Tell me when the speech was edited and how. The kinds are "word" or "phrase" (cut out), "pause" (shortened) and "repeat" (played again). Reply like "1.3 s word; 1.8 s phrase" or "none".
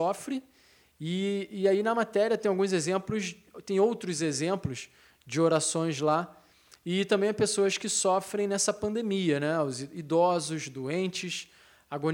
none